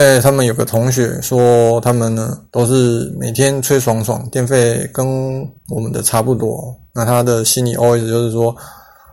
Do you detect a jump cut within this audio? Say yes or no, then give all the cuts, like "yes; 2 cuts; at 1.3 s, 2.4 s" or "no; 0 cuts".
yes; 1 cut; at 2.5 s